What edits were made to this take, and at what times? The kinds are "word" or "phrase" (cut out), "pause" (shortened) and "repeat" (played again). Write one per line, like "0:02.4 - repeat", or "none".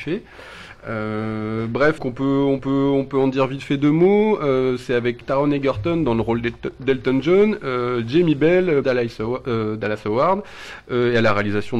0:02.0 - word
0:02.6 - repeat
0:05.2 - word
0:08.8 - word

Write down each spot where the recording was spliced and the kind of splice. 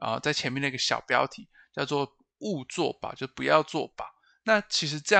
none

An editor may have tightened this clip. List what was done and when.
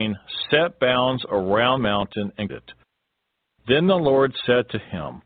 0:01.8 - word
0:02.5 - word

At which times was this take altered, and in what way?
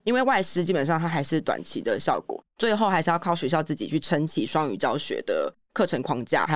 0:02.5 - pause

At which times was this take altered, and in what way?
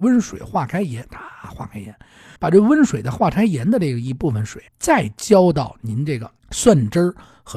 0:02.4 - pause
0:04.7 - pause
0:06.4 - pause

